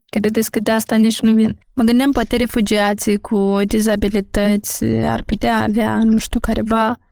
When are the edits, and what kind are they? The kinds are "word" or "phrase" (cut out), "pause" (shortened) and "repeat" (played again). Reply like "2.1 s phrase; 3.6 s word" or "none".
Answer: 1.6 s pause